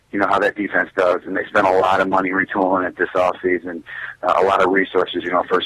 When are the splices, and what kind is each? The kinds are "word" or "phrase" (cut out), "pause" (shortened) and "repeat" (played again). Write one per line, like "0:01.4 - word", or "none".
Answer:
none